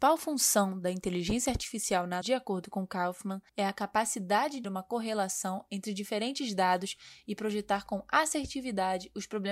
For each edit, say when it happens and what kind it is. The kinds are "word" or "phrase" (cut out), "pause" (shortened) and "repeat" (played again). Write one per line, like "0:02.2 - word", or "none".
0:02.2 - word
0:03.5 - pause
0:04.6 - word